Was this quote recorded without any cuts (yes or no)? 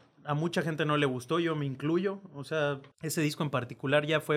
no